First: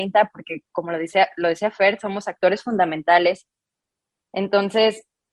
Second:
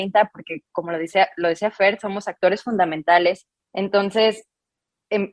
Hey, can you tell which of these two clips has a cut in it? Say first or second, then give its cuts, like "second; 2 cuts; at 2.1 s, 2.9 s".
second; 1 cut; at 3.6 s